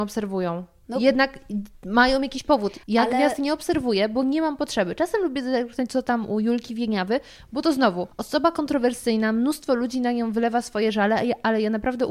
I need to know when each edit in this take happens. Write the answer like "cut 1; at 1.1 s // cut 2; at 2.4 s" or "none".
cut 1; at 2.8 s // cut 2; at 8.1 s